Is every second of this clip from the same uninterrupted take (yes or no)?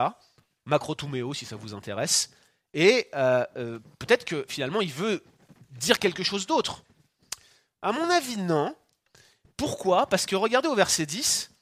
yes